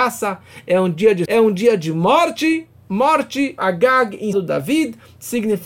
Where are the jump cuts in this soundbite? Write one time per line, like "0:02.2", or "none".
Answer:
0:01.3
0:03.6
0:04.3